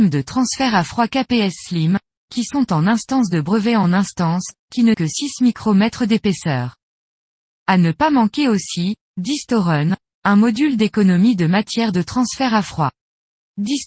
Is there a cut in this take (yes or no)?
yes